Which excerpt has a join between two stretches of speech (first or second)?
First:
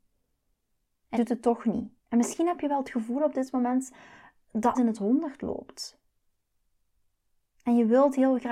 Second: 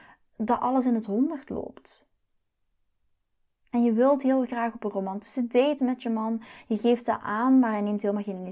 first